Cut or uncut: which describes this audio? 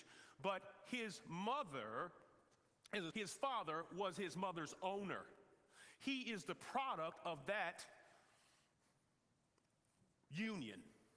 cut